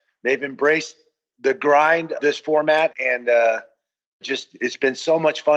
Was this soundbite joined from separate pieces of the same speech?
yes; 3 cuts; at 2.2 s, 2.9 s, 4.2 s

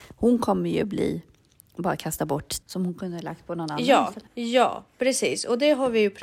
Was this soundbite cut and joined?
yes; 2 cuts; at 2.6 s, 4.3 s

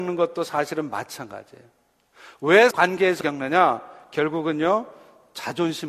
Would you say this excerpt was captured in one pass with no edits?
no; 2 cuts; at 2.7 s, 3.2 s

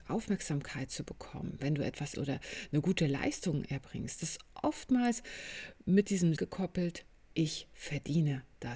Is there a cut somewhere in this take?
yes; 3 cuts; at 2.1 s, 4.2 s, 6.4 s

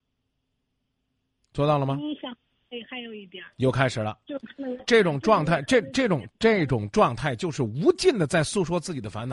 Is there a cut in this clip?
no; 0 cuts

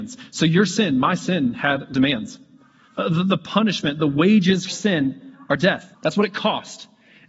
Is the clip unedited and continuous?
no; 3 cuts; at 1.9 s, 4.7 s, 5.9 s

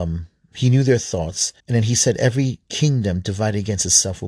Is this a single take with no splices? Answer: no; 1 cut; at 1.6 s

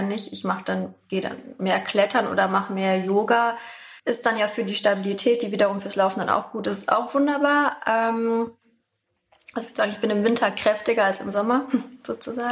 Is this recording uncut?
no; 1 cut; at 4.0 s

